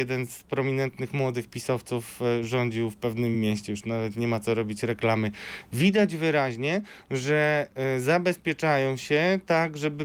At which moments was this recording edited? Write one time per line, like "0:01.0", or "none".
none